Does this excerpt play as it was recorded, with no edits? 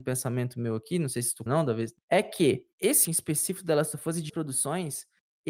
no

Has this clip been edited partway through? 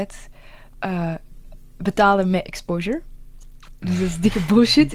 no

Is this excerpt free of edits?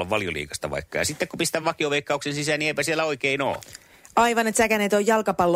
yes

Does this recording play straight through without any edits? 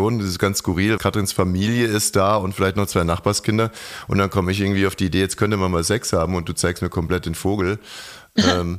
no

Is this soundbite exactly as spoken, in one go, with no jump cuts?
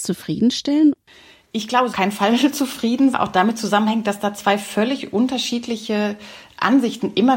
no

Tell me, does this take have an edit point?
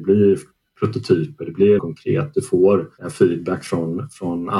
yes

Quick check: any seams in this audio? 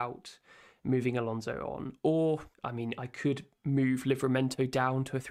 yes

